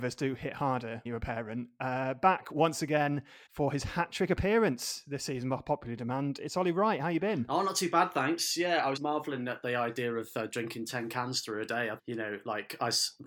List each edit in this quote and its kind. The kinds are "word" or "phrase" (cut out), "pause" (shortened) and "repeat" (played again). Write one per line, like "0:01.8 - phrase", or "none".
0:01.1 - word
0:03.5 - pause
0:09.0 - word
0:12.0 - word